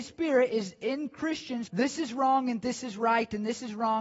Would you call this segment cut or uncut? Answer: cut